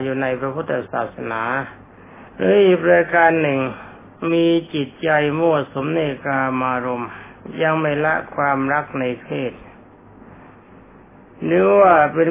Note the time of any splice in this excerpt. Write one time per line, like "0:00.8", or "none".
0:02.3

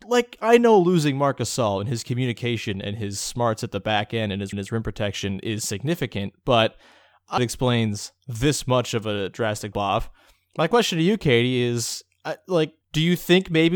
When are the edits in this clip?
0:04.5
0:07.4
0:09.7
0:12.8

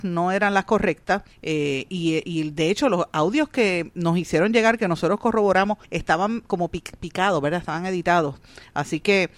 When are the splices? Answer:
0:01.3
0:05.8

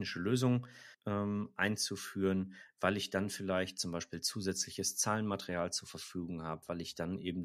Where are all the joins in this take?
0:00.9

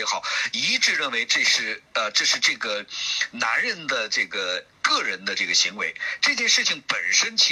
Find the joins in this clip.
none

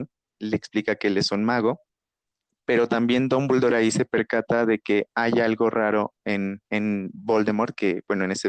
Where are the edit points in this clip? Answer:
0:02.3
0:06.6

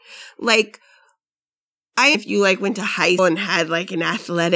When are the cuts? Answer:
0:02.1
0:03.2

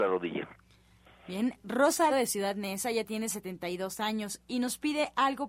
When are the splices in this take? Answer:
0:02.1

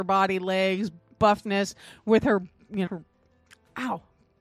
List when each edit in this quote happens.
0:01.2
0:02.9

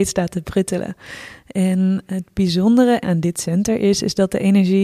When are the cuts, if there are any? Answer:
0:03.0

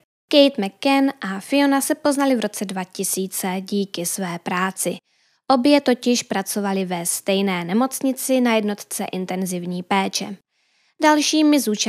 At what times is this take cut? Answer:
none

